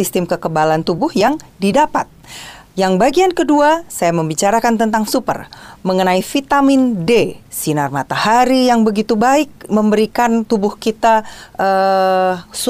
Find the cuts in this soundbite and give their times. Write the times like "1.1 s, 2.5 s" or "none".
5.1 s, 7.5 s